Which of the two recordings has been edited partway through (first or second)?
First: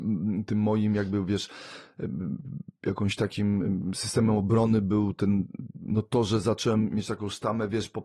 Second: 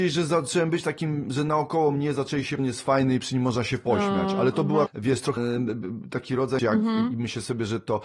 second